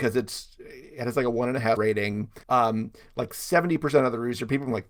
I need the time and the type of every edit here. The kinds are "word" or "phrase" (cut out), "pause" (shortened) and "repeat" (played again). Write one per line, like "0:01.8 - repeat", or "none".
0:01.8 - word
0:02.4 - pause